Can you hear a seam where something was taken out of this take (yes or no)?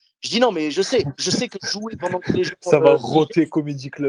no